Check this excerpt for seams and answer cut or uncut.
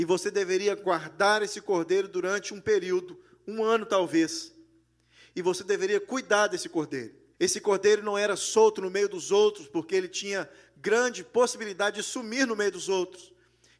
cut